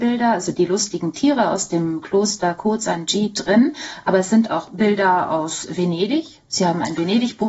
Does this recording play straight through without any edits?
yes; 0 cuts

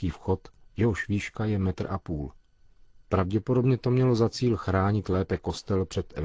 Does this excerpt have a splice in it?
no; 0 cuts

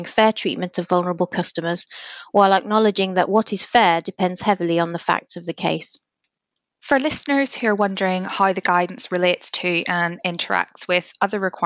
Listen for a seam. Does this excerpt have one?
no; 0 cuts

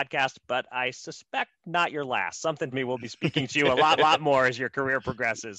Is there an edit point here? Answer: yes; 2 cuts; at 2.7 s, 4.0 s

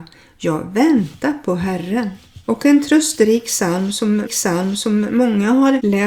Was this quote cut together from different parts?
yes; 2 cuts; at 2.4 s, 4.3 s

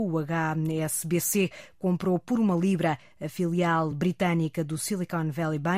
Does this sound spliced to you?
no; 0 cuts

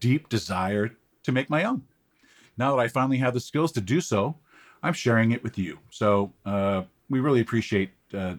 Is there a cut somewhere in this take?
no; 0 cuts

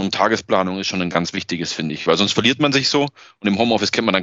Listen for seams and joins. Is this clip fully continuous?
yes; 0 cuts

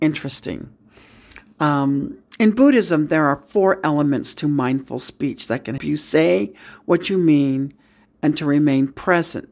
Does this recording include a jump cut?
yes; 1 cut; at 5.8 s

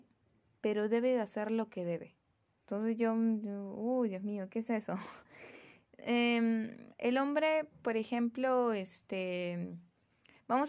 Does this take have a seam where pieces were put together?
yes; 3 cuts; at 2.4 s, 5.2 s, 6.9 s

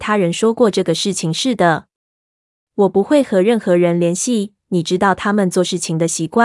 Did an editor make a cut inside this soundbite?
no; 0 cuts

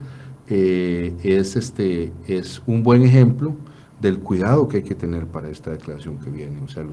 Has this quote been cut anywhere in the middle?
no; 0 cuts

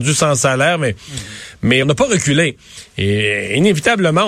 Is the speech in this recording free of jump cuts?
no; 1 cut; at 1.8 s

